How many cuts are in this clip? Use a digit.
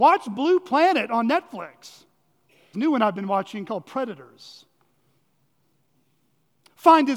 1